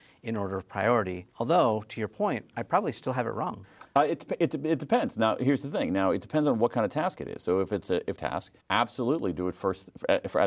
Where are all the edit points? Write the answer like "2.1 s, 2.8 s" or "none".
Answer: 1.3 s, 8.2 s, 8.6 s

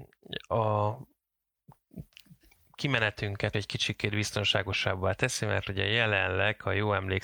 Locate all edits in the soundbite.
3.5 s

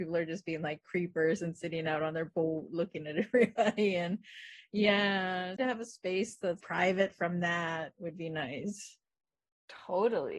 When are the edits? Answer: 5.6 s, 6.6 s

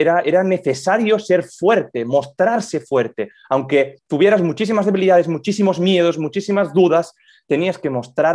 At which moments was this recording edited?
4.0 s

